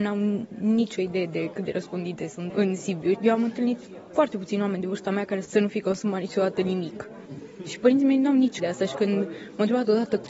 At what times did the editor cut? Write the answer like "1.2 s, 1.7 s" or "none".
2.5 s, 3.1 s, 8.6 s